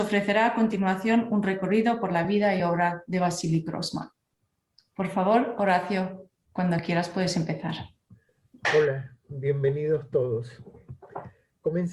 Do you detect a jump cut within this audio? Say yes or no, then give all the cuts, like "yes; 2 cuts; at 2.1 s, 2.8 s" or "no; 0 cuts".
no; 0 cuts